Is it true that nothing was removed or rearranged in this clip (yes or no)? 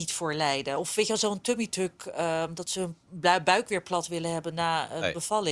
yes